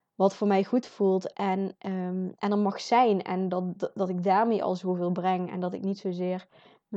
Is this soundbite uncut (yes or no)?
yes